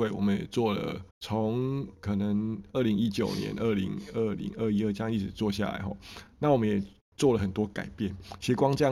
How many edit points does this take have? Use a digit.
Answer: 1